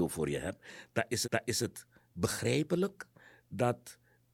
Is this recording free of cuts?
no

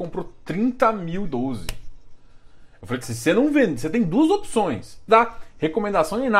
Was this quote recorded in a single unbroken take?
no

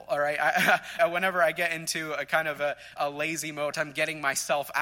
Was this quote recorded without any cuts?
no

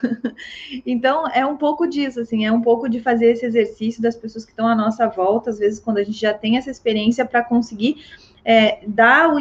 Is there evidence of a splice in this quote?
no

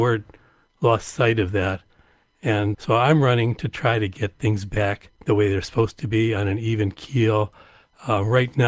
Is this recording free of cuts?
no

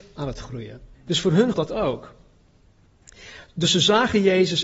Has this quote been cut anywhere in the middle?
yes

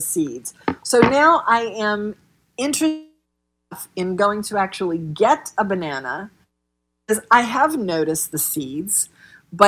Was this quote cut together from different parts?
no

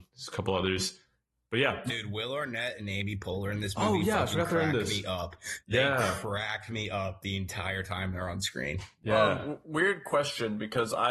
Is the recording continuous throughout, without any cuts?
yes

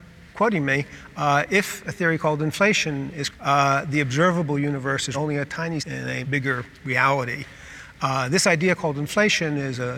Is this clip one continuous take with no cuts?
no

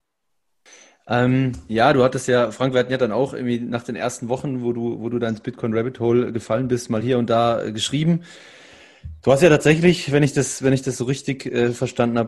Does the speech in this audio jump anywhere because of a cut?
no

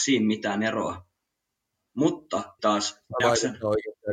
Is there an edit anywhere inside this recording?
yes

